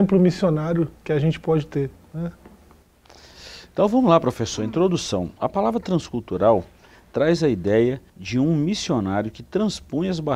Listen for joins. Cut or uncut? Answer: cut